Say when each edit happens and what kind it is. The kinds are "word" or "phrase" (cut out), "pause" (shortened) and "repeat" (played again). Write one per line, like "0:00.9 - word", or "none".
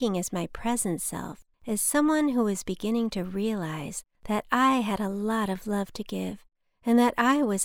0:01.5 - pause